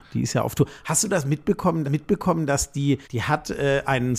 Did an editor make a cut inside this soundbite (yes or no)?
yes